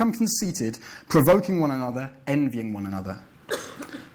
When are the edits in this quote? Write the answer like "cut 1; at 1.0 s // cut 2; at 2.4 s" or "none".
none